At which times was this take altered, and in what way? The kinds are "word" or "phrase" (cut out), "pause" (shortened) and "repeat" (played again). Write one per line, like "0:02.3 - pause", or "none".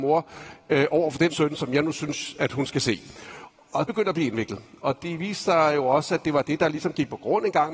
0:01.3 - word
0:03.9 - word

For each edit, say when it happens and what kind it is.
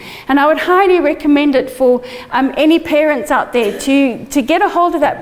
none

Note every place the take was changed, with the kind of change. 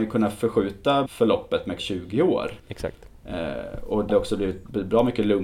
0:01.1 - word
0:01.8 - word
0:02.6 - pause
0:04.1 - word

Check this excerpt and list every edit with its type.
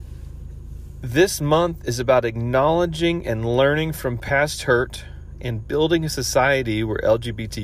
none

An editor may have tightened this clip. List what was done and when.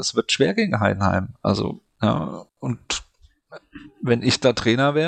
none

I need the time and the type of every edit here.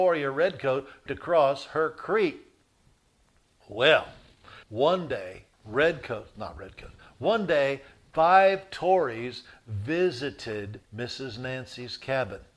0:01.1 - word
0:04.6 - pause
0:05.5 - pause
0:08.0 - pause
0:10.8 - pause

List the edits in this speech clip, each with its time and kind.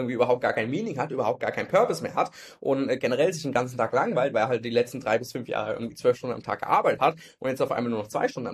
none

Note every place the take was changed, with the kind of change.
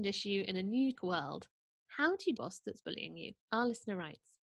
0:01.0 - word
0:02.4 - phrase
0:03.4 - pause

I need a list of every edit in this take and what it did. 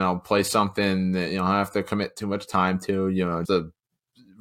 0:03.4 - word

